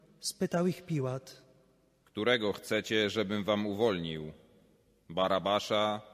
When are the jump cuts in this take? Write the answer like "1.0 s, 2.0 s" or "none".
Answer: none